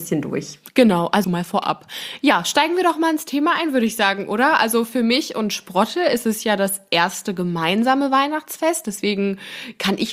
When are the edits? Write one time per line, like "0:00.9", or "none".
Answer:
0:01.2